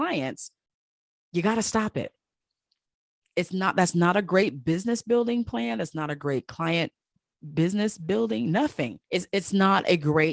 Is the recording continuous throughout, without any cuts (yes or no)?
no